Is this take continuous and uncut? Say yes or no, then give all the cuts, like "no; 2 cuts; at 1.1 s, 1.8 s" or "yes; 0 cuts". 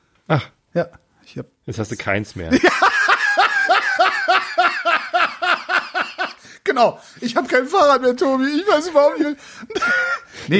yes; 0 cuts